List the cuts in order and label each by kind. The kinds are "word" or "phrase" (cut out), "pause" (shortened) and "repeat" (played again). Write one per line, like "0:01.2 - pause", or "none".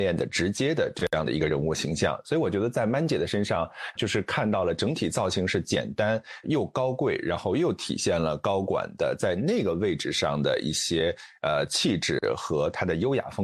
0:04.0 - word
0:06.4 - word

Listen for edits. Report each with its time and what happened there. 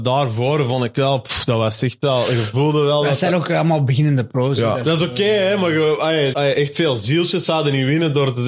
0:06.3 - word

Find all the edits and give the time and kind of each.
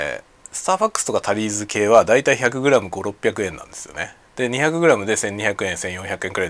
none

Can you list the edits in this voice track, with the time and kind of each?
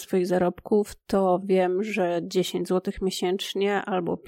none

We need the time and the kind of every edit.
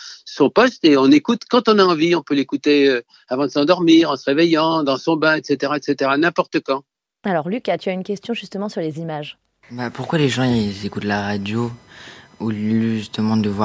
none

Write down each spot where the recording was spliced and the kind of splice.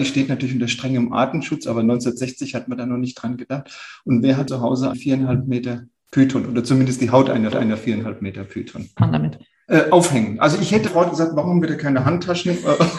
0:04.5 - word
0:04.9 - word
0:07.5 - repeat
0:09.0 - phrase
0:10.9 - phrase

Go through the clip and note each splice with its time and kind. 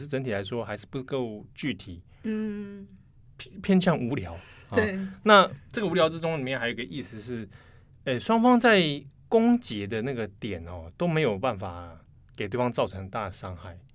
none

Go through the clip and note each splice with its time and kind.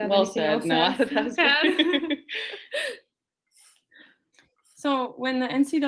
none

